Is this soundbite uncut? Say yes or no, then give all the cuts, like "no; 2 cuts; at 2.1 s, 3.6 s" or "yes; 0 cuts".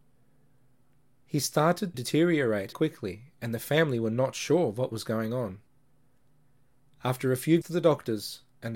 no; 3 cuts; at 1.9 s, 2.7 s, 7.6 s